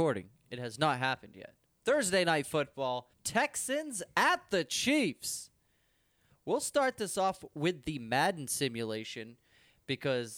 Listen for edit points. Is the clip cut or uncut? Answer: cut